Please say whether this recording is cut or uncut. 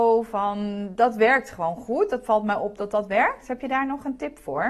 uncut